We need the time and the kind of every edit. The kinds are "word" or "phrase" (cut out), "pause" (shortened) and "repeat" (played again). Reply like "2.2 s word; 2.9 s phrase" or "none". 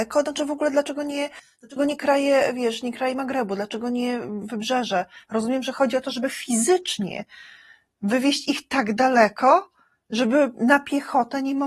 none